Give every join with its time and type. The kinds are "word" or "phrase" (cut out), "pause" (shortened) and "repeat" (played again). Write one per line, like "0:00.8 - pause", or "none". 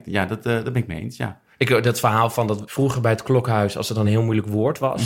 none